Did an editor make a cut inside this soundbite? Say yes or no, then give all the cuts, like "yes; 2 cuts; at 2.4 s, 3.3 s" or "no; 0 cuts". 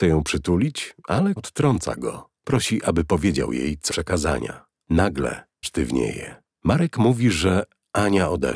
yes; 3 cuts; at 1.4 s, 3.9 s, 5.6 s